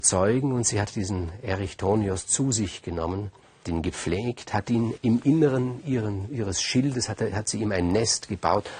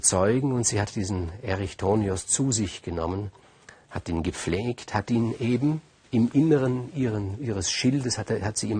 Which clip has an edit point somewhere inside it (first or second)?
first